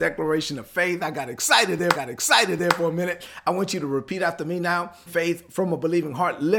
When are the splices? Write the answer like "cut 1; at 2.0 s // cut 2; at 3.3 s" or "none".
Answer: cut 1; at 1.9 s // cut 2; at 5.1 s

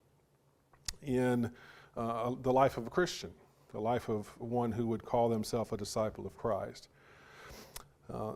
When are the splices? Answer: none

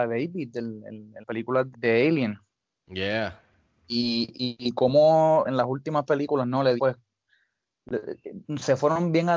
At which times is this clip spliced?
cut 1; at 1.2 s // cut 2; at 1.7 s // cut 3; at 5.4 s // cut 4; at 6.8 s

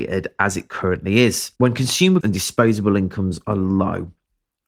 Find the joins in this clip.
cut 1; at 1.6 s // cut 2; at 2.2 s

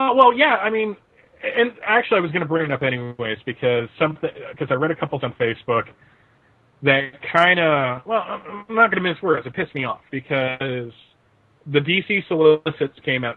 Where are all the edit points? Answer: cut 1; at 5.2 s

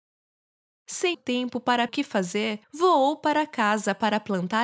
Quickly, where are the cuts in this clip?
cut 1; at 1.1 s // cut 2; at 1.9 s // cut 3; at 2.6 s

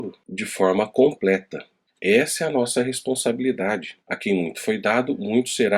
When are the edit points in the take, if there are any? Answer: cut 1; at 4.0 s

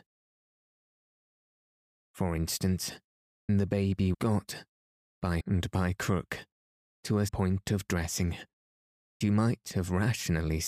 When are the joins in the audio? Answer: cut 1; at 3.5 s // cut 2; at 4.1 s // cut 3; at 5.4 s // cut 4; at 7.3 s // cut 5; at 9.2 s

